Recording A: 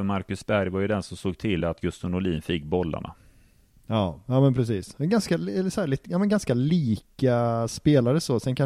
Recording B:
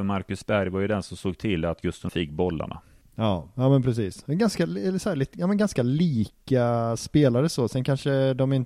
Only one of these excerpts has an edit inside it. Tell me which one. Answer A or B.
B